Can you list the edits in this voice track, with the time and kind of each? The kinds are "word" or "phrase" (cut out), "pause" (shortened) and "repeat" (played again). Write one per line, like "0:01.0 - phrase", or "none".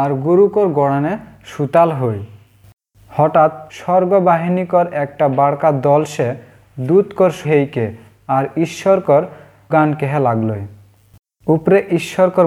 0:03.7 - pause
0:07.4 - word
0:09.7 - word